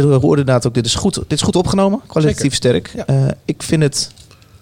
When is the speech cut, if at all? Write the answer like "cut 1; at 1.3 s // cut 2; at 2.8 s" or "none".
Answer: none